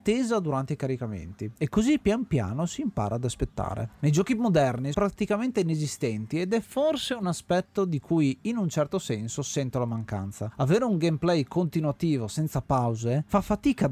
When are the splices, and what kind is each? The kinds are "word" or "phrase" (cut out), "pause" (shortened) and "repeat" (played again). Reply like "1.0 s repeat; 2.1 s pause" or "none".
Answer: 1.6 s pause; 4.9 s word